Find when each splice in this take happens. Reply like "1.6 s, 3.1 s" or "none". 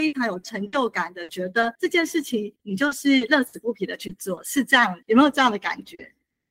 1.7 s, 2.6 s, 5.0 s